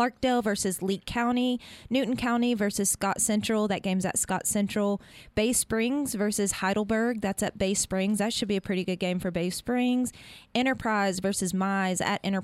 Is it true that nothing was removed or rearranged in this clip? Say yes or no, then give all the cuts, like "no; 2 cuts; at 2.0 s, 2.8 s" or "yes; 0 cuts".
yes; 0 cuts